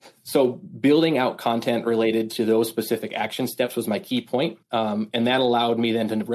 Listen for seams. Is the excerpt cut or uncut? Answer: cut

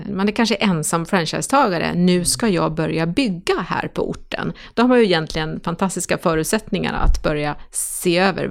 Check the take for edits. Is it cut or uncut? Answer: uncut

